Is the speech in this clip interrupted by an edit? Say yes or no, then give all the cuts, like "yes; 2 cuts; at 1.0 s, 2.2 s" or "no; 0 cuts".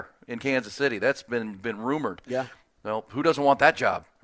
no; 0 cuts